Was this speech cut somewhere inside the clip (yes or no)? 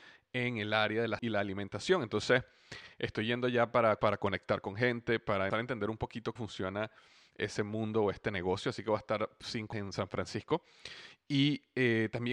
yes